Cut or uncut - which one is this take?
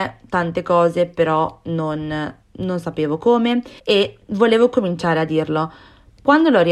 cut